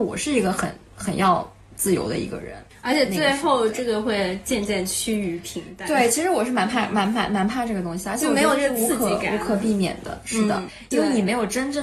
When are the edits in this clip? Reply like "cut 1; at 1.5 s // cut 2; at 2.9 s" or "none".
none